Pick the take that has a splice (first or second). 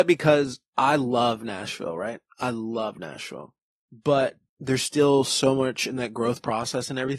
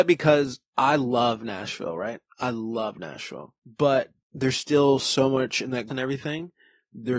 second